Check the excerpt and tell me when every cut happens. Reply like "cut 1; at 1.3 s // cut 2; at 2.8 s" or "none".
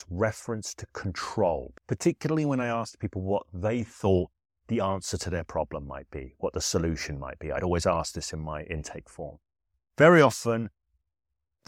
none

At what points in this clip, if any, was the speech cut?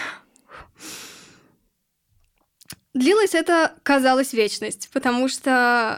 none

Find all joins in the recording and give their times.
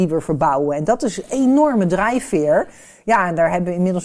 none

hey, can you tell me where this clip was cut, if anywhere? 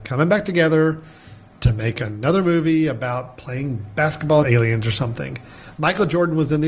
cut 1; at 4.4 s

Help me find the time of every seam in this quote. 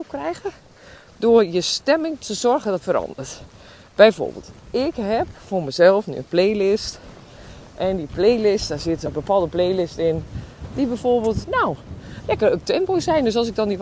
cut 1; at 2.8 s // cut 2; at 9.0 s // cut 3; at 11.4 s

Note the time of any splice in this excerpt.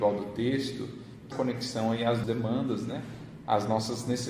cut 1; at 1.3 s // cut 2; at 2.2 s

